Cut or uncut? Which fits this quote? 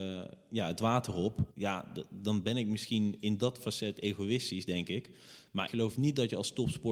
cut